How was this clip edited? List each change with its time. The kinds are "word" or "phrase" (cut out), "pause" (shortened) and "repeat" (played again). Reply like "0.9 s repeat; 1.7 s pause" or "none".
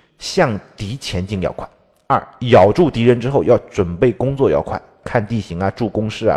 none